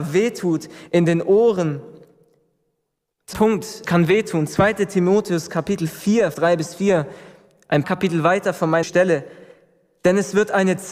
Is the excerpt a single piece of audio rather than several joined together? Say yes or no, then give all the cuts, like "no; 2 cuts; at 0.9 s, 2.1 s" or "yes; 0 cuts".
no; 5 cuts; at 3.3 s, 3.8 s, 6.3 s, 7.8 s, 8.8 s